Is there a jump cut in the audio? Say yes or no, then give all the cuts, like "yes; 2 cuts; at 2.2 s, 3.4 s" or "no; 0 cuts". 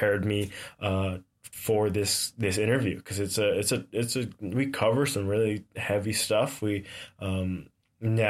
no; 0 cuts